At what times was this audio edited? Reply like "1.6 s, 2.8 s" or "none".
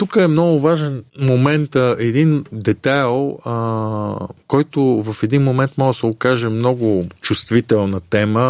1.1 s, 4.4 s, 7.2 s